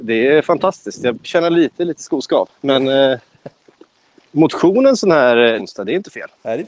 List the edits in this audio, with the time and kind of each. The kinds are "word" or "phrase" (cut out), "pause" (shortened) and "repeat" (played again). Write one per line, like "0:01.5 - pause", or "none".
0:01.2 - word
0:04.3 - word
0:05.6 - word